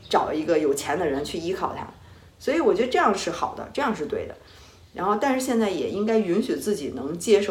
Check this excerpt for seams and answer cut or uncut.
uncut